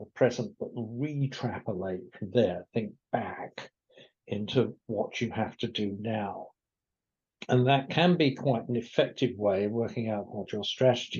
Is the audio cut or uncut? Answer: uncut